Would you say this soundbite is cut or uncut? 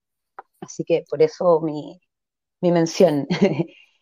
uncut